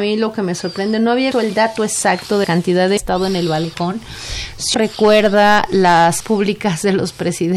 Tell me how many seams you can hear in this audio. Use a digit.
5